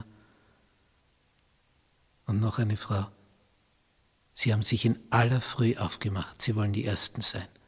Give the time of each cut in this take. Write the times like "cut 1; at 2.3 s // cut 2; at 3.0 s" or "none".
none